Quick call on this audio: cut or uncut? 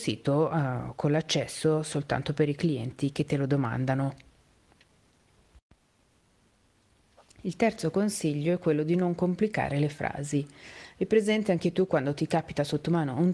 uncut